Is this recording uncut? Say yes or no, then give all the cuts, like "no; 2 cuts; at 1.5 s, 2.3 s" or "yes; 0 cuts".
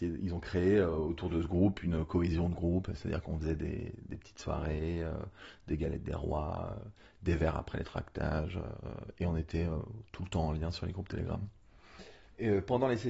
yes; 0 cuts